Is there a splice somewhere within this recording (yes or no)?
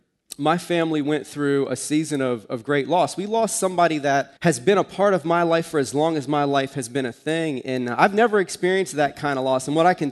yes